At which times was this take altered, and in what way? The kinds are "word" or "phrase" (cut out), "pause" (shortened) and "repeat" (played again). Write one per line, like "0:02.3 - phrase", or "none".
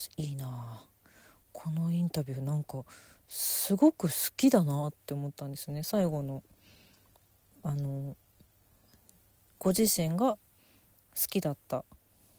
none